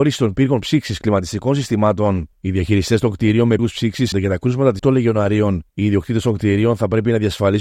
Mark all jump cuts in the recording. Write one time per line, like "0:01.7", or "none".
0:02.3
0:03.6
0:04.1
0:04.8
0:05.7